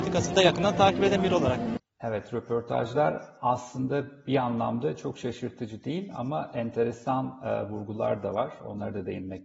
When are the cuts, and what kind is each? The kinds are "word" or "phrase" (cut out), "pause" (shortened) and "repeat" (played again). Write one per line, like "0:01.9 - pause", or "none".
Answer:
none

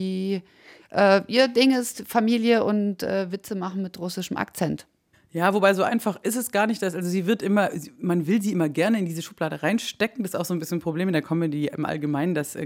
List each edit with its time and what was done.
none

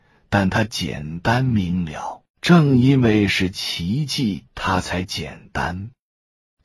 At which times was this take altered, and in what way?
0:02.3 - pause
0:04.5 - pause

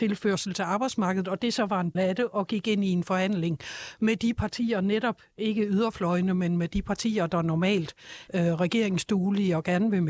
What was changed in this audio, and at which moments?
0:01.9 - word
0:08.3 - word

